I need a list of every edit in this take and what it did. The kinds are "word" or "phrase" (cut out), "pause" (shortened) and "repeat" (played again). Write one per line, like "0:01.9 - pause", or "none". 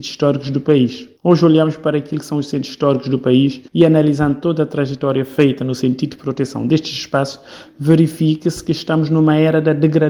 0:01.2 - pause
0:03.7 - pause